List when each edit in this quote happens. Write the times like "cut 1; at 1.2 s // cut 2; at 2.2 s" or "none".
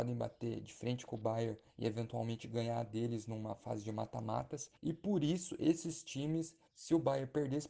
cut 1; at 1.7 s // cut 2; at 4.8 s // cut 3; at 6.7 s